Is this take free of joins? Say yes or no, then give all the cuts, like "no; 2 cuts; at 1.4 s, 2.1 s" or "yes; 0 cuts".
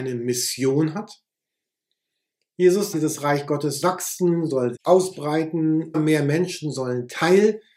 no; 4 cuts; at 2.9 s, 3.8 s, 4.8 s, 5.9 s